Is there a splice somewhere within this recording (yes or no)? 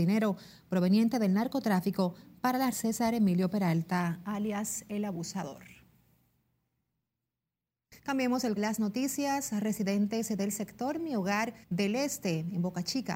yes